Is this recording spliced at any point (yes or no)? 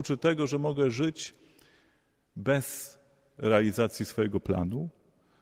no